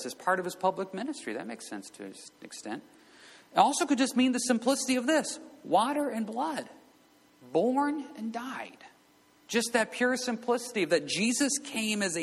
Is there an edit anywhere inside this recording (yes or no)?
no